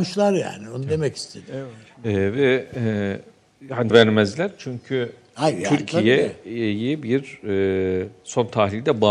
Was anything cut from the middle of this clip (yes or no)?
yes